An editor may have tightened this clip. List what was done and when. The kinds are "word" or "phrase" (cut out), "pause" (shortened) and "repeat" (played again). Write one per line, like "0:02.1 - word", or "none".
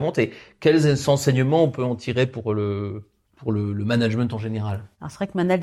0:03.3 - pause